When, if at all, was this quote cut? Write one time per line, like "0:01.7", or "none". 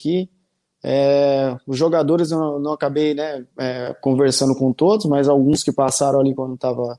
0:03.5

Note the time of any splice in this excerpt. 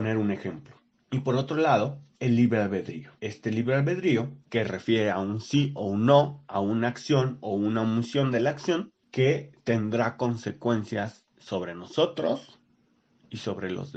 0:00.9
0:02.1
0:03.2
0:04.4
0:11.3

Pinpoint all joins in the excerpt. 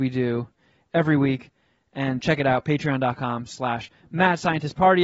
0:02.2

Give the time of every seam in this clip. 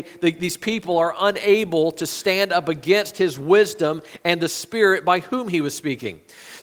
none

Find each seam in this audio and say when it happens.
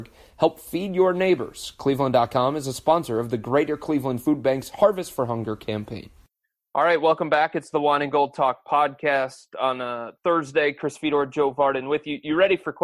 none

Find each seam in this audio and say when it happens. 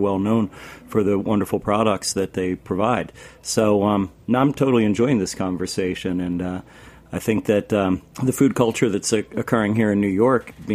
0:08.1

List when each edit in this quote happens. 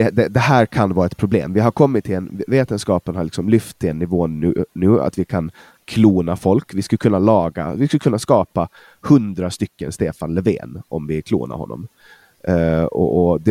none

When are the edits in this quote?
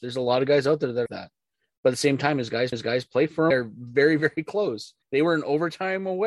0:01.1
0:02.7
0:03.5
0:05.0

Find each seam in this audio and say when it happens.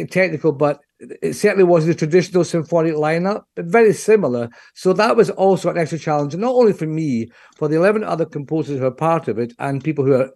none

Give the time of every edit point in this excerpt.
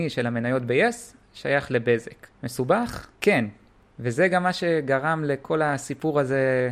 0:03.1

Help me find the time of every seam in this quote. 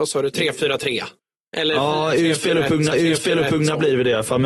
0:01.2
0:02.9

